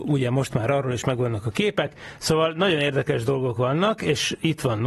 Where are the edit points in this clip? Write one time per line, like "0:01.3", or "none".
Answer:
none